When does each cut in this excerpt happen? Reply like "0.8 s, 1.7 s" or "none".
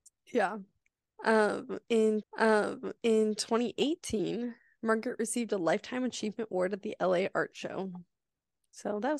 2.2 s

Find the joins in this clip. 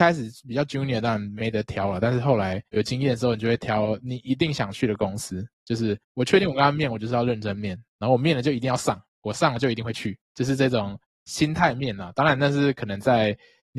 6.0 s, 10.2 s

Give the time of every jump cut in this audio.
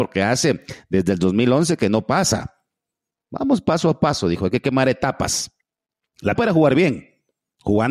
6.4 s

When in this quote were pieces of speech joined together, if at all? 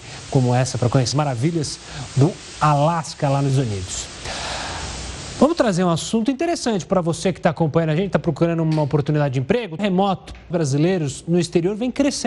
1.1 s, 3.5 s, 9.8 s, 10.5 s

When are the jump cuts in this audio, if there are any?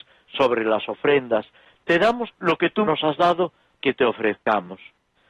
2.3 s, 2.8 s, 3.8 s

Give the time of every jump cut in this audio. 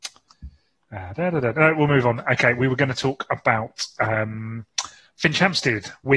none

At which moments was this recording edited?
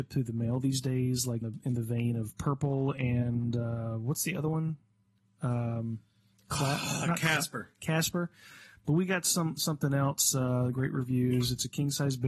1.4 s, 10.7 s

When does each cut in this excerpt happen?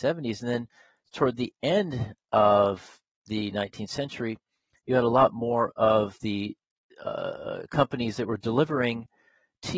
none

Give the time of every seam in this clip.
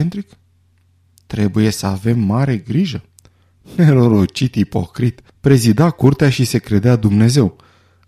5.3 s

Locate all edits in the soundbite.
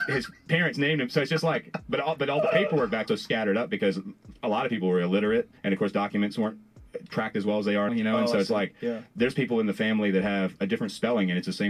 3.1 s, 5.6 s, 7.9 s

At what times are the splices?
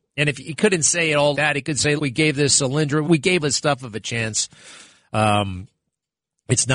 1.3 s, 2.0 s, 3.0 s, 3.4 s, 3.8 s

